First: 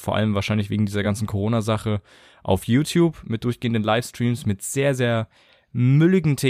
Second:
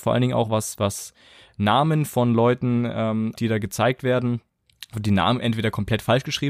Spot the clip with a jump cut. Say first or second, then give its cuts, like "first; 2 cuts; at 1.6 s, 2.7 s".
second; 2 cuts; at 3.3 s, 4.9 s